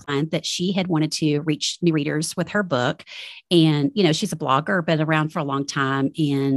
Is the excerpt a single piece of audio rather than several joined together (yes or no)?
yes